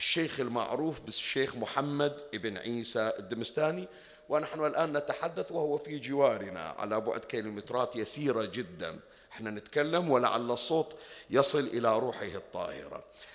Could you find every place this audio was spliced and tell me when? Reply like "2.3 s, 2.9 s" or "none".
none